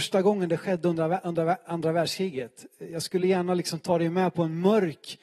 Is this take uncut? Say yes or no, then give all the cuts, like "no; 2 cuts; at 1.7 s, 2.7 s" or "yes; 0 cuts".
yes; 0 cuts